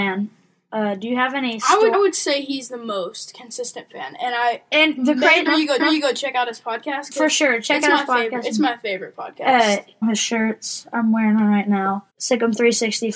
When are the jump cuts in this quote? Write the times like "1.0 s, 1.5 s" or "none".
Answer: 1.9 s, 5.5 s, 5.8 s, 10.0 s, 12.1 s